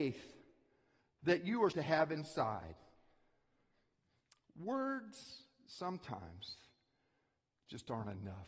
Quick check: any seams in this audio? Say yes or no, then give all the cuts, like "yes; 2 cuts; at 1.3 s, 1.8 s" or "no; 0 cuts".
yes; 1 cut; at 1.7 s